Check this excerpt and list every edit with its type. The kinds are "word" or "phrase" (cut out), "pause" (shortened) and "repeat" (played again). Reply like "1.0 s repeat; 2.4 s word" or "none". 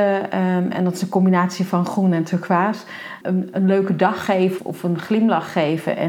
3.2 s word; 4.6 s word

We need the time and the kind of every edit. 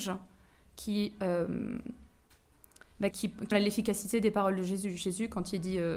3.1 s word; 3.5 s word

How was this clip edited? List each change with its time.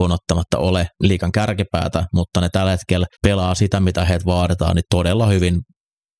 0.9 s pause; 3.1 s pause

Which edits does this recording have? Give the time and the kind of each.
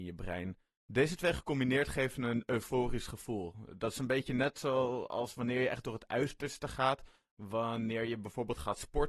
none

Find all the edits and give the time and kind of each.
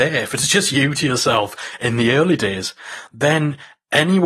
1.0 s word

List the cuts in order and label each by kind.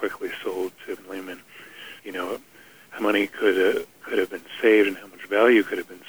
1.0 s word; 2.0 s pause; 3.0 s word; 3.9 s pause

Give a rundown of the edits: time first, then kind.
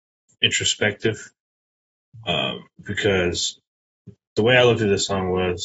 2.7 s pause

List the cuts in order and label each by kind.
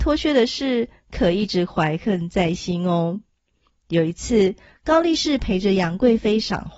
none

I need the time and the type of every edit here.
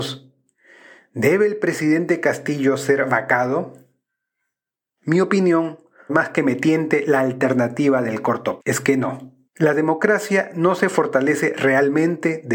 6.1 s word; 8.6 s word; 9.5 s pause

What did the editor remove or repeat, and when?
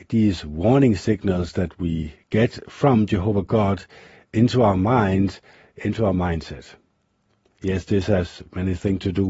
none

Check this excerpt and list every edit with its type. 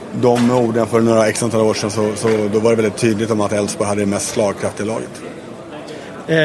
none

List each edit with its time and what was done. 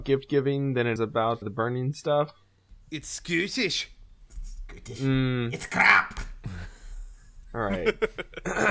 1.0 s word; 1.4 s word; 7.4 s pause

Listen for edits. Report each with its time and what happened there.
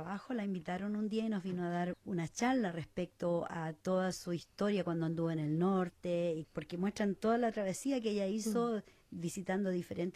none

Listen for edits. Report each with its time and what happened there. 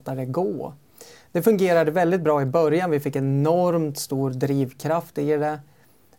none

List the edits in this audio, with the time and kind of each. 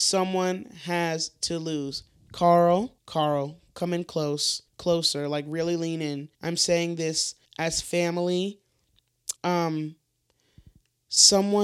3.0 s pause; 4.7 s pause; 6.3 s pause; 7.5 s pause; 9.4 s pause

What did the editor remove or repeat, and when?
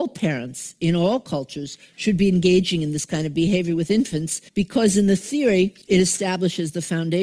4.5 s pause; 5.8 s pause

